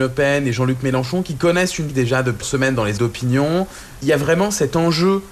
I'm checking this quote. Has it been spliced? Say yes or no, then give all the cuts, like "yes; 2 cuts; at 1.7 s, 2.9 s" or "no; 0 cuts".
yes; 3 cuts; at 1.9 s, 2.4 s, 3.0 s